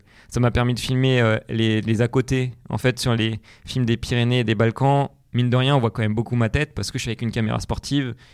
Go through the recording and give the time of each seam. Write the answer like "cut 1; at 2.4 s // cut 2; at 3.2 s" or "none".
none